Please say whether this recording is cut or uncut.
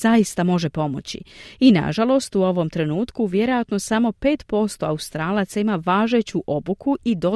uncut